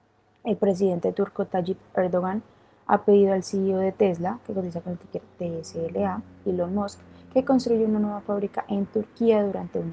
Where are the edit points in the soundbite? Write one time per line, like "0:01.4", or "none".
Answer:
none